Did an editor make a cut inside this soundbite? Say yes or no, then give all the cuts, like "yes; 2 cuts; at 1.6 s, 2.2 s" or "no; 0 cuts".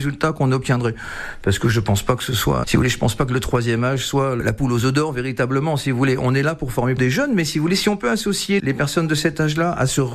yes; 3 cuts; at 2.6 s, 7.0 s, 8.6 s